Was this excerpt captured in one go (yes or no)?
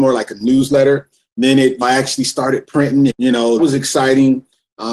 no